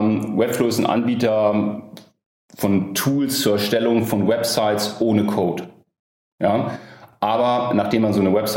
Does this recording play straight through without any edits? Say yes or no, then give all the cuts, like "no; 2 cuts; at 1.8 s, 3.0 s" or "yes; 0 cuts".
yes; 0 cuts